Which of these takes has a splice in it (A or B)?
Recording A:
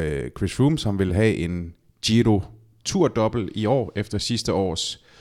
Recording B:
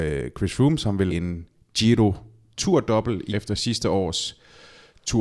B